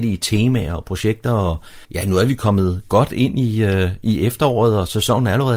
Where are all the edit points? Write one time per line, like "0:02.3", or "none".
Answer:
0:01.8